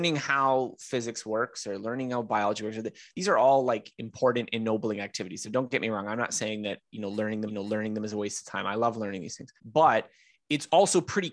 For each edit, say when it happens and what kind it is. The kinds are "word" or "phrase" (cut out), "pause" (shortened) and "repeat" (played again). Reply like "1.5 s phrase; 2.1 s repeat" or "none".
7.5 s repeat; 9.6 s pause

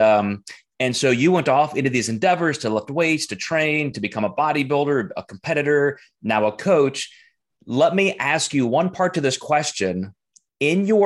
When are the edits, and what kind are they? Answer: none

